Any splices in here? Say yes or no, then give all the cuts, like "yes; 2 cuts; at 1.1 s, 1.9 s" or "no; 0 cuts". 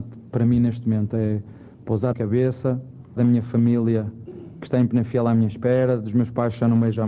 yes; 3 cuts; at 1.7 s, 2.1 s, 3.2 s